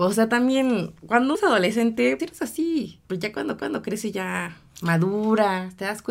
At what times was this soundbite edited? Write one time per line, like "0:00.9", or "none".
0:01.3
0:02.2
0:03.0
0:03.6